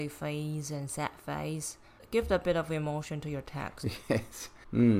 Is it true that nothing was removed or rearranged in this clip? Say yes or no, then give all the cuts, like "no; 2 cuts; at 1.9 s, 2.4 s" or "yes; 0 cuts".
yes; 0 cuts